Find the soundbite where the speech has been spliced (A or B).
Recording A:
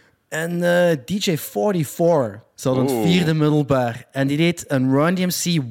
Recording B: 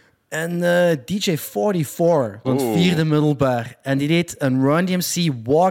B